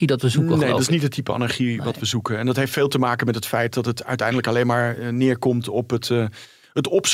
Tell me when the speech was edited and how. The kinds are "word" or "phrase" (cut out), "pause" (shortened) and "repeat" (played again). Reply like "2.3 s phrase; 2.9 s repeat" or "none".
none